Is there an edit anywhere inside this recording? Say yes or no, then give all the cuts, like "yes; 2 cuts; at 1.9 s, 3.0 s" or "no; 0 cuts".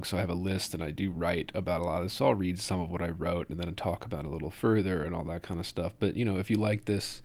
no; 0 cuts